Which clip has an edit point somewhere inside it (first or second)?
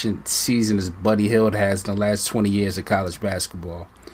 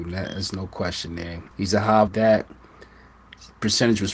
second